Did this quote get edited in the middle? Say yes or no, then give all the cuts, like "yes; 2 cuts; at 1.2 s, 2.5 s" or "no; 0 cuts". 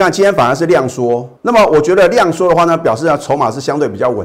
yes; 1 cut; at 1.4 s